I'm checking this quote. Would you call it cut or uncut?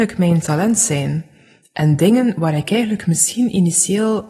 uncut